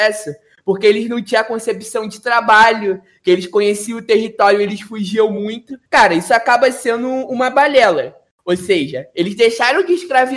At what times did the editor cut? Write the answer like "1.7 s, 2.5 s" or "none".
5.9 s